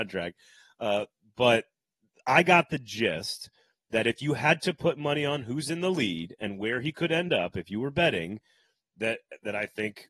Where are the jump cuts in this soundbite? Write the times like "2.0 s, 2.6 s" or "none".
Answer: none

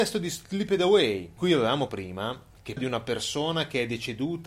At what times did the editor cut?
1.4 s, 1.9 s, 2.8 s

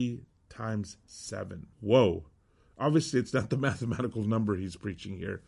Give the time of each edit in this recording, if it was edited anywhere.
1.7 s

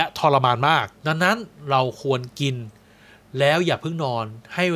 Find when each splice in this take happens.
1.0 s

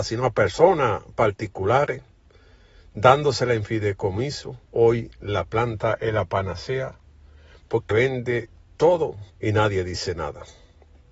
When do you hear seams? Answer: 4.6 s, 7.9 s, 9.3 s

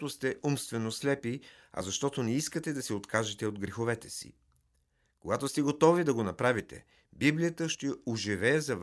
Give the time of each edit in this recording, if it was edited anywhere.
none

